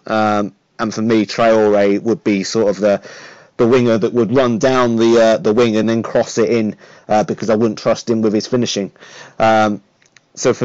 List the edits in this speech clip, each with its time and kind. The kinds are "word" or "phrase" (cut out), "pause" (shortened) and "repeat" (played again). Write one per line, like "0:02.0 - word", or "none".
none